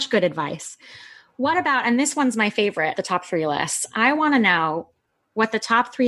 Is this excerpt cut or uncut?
cut